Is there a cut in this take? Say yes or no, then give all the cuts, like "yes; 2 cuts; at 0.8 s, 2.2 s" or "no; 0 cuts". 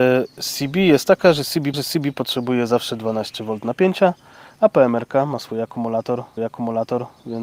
yes; 2 cuts; at 1.7 s, 6.4 s